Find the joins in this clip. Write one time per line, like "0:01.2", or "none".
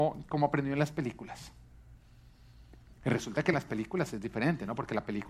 none